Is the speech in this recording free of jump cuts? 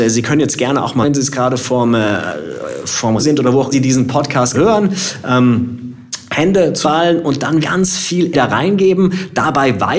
no; 7 cuts; at 1.0 s, 3.2 s, 3.7 s, 4.5 s, 6.8 s, 7.6 s, 8.3 s

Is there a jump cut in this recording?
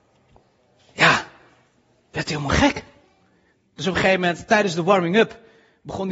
no; 0 cuts

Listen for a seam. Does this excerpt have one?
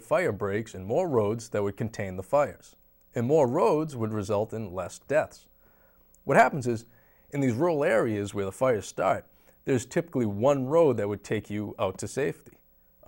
no; 0 cuts

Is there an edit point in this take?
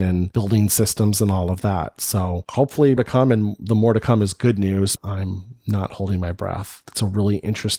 yes; 2 cuts; at 3.0 s, 5.0 s

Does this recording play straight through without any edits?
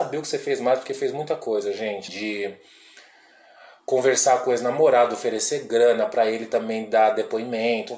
no; 1 cut; at 2.1 s

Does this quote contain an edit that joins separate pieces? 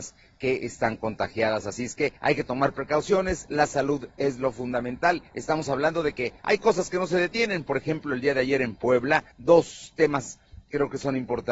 yes; 4 cuts; at 2.2 s, 5.3 s, 6.4 s, 9.3 s

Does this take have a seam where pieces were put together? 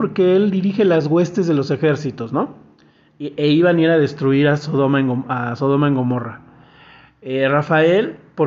no; 0 cuts

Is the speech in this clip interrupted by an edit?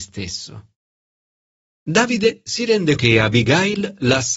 yes; 1 cut; at 3.0 s

